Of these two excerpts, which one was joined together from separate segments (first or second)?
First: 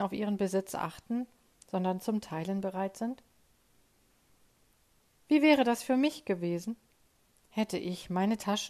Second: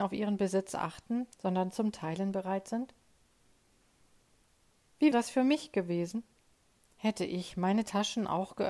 second